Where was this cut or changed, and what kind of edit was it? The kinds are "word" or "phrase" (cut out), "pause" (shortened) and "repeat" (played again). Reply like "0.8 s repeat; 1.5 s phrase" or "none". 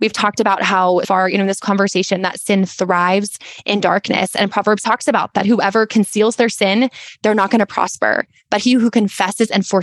1.0 s word; 4.8 s word; 5.3 s word